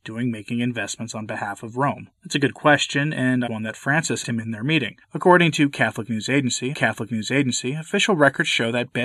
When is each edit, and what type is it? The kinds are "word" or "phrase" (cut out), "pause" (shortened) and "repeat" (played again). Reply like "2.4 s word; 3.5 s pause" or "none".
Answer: 2.2 s pause; 3.5 s phrase; 4.2 s word; 5.0 s pause; 6.7 s repeat